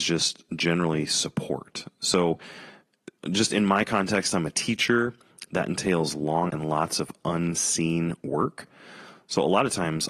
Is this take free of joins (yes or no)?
no